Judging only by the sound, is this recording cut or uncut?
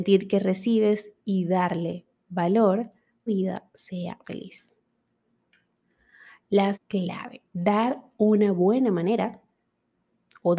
cut